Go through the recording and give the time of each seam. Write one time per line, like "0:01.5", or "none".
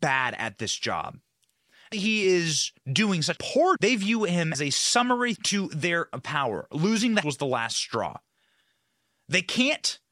0:01.9
0:03.4
0:03.8
0:04.5
0:05.4
0:06.1
0:07.2